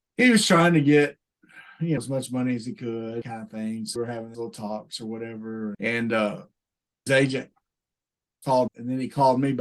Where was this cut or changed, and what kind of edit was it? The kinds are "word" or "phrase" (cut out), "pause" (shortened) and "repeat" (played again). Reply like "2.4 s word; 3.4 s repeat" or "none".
2.0 s word; 3.2 s word; 4.0 s word; 4.3 s word; 5.7 s word; 7.1 s word; 8.7 s word